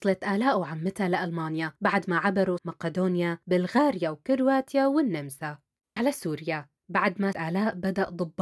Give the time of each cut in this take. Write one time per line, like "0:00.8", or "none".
0:01.8
0:02.6
0:03.4
0:06.0
0:06.8
0:07.3